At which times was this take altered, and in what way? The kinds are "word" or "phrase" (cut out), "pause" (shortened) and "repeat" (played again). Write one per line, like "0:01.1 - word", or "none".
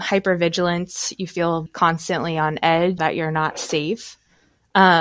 0:01.7 - word
0:03.0 - word